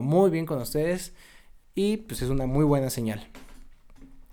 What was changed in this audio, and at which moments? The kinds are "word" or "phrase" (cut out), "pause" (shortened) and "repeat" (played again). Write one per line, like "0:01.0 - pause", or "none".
none